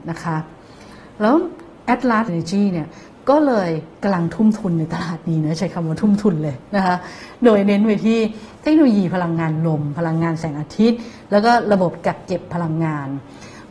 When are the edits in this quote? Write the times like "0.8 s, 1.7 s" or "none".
2.3 s